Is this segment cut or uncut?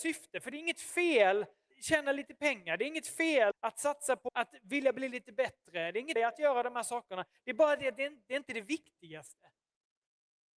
cut